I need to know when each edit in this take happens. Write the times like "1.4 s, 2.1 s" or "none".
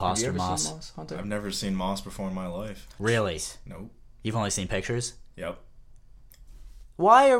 none